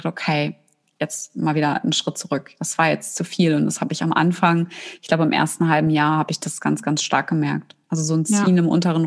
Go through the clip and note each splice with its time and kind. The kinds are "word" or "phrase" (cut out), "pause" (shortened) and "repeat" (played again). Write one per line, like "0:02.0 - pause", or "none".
none

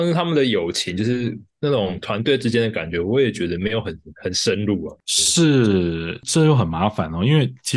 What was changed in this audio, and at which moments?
0:01.5 - pause

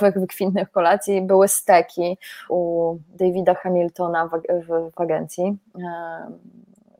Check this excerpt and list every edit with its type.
0:02.5 - word
0:04.9 - word

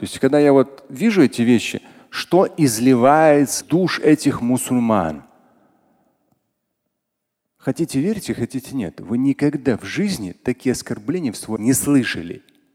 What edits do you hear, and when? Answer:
0:03.6 - word
0:11.6 - word

